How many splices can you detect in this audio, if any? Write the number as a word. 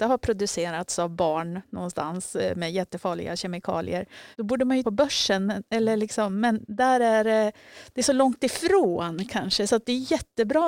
two